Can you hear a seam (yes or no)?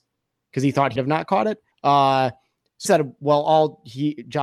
yes